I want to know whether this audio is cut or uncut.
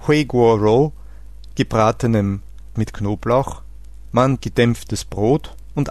cut